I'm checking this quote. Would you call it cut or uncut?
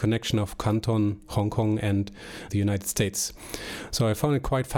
cut